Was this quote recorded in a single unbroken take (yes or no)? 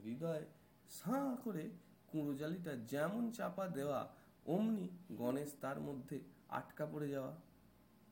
yes